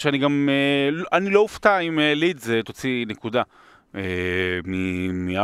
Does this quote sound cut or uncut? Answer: uncut